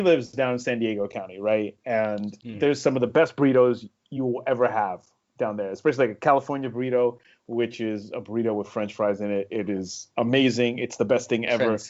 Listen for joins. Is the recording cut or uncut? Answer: uncut